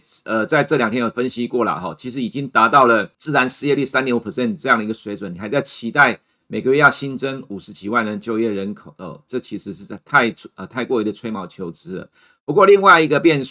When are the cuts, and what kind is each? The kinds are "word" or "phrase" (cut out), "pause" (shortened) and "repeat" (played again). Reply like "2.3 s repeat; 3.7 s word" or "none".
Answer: 3.1 s pause